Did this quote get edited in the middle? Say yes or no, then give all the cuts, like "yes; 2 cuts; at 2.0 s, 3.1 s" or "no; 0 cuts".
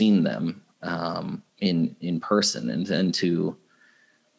yes; 1 cut; at 1.5 s